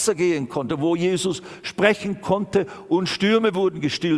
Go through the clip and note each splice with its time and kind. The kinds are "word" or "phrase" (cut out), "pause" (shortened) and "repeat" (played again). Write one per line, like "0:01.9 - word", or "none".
none